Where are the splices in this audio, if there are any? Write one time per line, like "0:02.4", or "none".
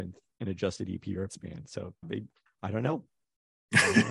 0:01.3
0:02.0
0:02.5